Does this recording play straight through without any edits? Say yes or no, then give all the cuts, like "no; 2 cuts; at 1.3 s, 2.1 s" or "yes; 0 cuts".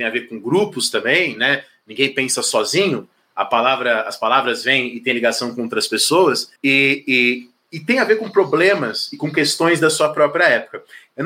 no; 1 cut; at 6.6 s